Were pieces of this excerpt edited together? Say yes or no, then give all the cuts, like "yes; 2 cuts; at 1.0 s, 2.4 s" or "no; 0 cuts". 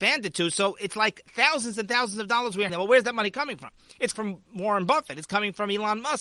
yes; 2 cuts; at 2.7 s, 4.1 s